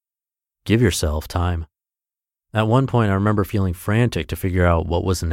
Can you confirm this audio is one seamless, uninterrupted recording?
yes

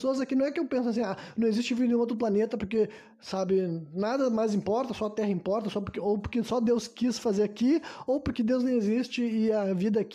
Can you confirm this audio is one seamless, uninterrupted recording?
yes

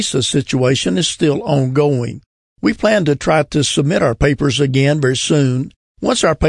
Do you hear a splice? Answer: no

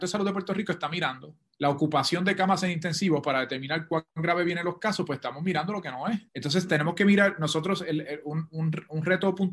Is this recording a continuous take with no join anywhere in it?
no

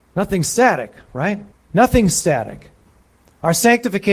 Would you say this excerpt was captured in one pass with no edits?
no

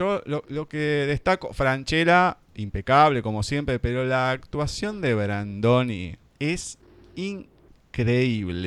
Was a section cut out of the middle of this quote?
yes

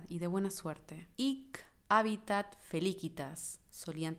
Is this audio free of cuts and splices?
no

